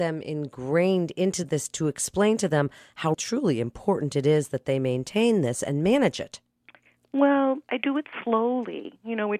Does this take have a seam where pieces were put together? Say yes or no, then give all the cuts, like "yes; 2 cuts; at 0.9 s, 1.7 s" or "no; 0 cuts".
yes; 1 cut; at 3.1 s